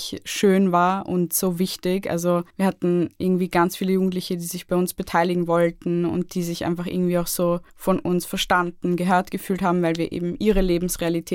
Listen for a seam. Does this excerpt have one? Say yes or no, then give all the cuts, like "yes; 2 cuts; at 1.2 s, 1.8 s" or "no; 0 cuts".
yes; 2 cuts; at 2.5 s, 7.7 s